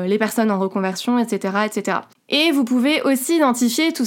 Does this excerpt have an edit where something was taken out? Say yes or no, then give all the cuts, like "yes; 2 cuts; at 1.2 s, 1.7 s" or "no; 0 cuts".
no; 0 cuts